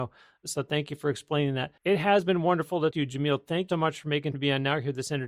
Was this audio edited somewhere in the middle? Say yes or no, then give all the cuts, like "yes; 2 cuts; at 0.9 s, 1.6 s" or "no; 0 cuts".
yes; 4 cuts; at 1.8 s, 2.9 s, 3.7 s, 4.3 s